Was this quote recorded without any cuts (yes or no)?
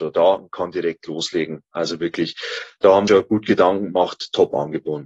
no